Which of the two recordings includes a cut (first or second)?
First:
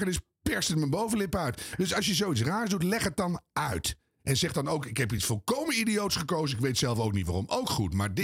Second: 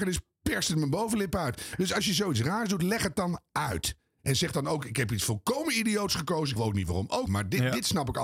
second